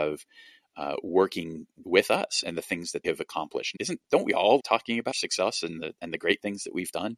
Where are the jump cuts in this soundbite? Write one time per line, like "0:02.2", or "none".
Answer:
0:01.8
0:02.4
0:03.0
0:03.8
0:04.6
0:05.1